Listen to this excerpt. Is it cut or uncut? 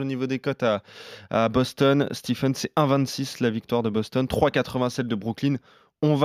uncut